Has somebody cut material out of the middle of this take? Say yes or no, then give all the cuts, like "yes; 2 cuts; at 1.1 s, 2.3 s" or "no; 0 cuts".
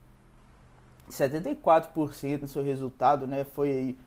yes; 1 cut; at 2.4 s